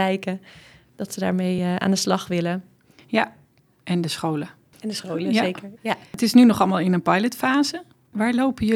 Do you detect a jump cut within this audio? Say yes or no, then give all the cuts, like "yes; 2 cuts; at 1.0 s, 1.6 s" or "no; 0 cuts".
no; 0 cuts